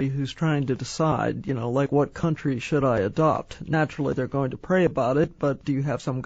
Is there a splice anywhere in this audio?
no; 0 cuts

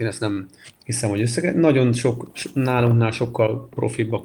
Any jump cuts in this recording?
no; 0 cuts

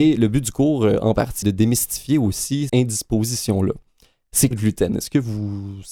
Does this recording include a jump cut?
yes; 3 cuts; at 1.4 s, 2.7 s, 4.5 s

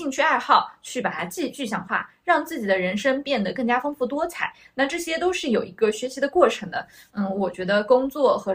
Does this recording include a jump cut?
no; 0 cuts

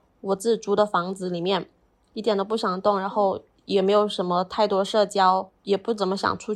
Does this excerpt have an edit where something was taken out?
no; 0 cuts

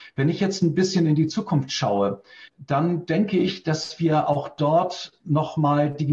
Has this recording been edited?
yes; 1 cut; at 2.5 s

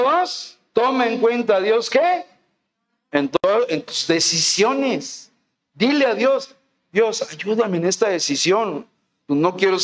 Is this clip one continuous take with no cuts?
yes; 0 cuts

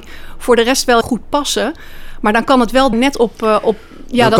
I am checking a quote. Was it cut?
yes; 2 cuts; at 1.0 s, 2.9 s

